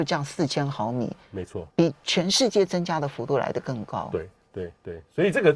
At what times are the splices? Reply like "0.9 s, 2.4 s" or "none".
1.7 s